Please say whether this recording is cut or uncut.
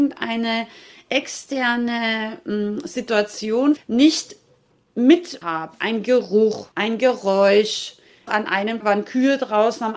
cut